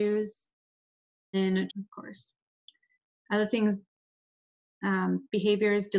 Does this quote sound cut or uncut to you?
cut